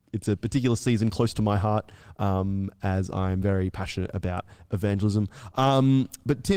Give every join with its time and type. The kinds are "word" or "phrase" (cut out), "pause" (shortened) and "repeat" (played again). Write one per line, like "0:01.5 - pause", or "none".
none

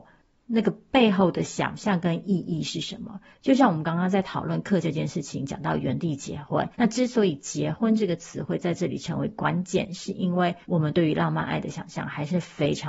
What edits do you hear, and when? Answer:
0:04.8 - word
0:06.7 - pause
0:10.6 - pause

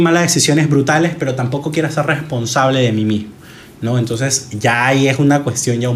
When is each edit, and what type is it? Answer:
none

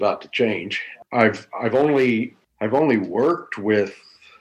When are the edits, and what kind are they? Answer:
0:01.0 - pause

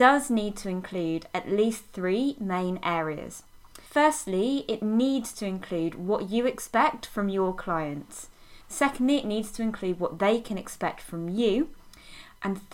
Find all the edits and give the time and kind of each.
0:03.9 - pause
0:08.6 - pause

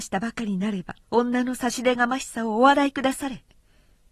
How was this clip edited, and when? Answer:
0:01.0 - pause

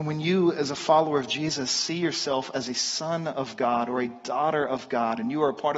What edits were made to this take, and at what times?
none

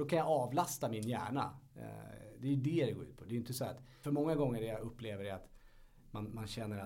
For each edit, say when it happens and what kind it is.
0:04.0 - word

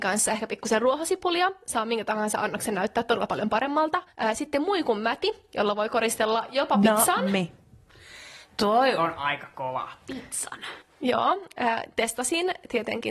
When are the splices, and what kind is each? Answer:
0:04.1 - pause
0:08.4 - pause

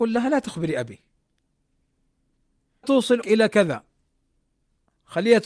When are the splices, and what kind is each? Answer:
0:02.8 - word
0:03.2 - word

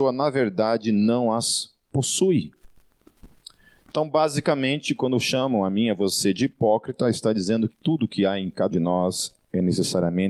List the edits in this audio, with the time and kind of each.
0:07.7 - word
0:08.7 - word

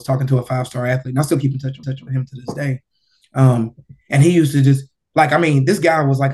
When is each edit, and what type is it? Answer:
0:01.8 - repeat

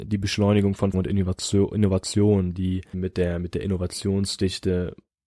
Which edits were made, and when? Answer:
0:00.9 - word
0:02.9 - word

